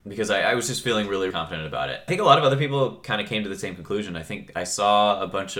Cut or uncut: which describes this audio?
cut